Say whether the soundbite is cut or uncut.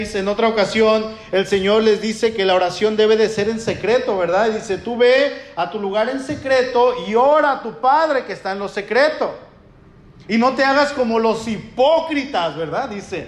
uncut